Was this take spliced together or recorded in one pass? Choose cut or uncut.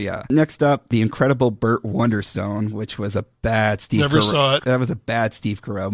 uncut